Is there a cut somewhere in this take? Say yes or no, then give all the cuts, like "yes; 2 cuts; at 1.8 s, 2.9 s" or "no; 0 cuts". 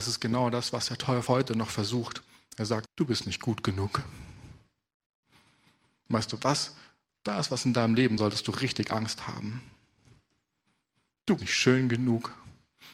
yes; 4 cuts; at 1.3 s, 2.9 s, 8.2 s, 11.4 s